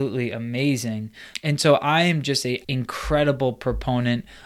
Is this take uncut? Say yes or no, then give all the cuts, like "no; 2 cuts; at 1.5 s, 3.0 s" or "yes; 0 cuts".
no; 1 cut; at 2.6 s